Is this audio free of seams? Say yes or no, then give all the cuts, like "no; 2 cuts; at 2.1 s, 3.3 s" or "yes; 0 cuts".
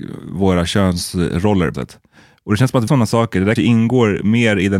no; 3 cuts; at 1.7 s, 2.9 s, 3.6 s